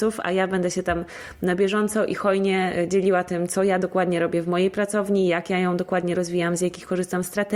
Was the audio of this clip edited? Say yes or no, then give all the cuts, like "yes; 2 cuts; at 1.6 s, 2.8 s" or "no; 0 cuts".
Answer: no; 0 cuts